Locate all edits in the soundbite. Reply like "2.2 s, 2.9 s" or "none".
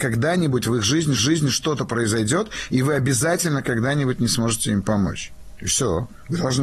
1.2 s